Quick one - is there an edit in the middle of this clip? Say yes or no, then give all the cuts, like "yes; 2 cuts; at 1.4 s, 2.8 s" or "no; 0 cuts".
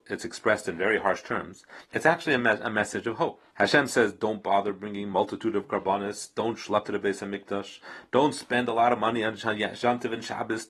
yes; 3 cuts; at 1.8 s, 3.5 s, 6.8 s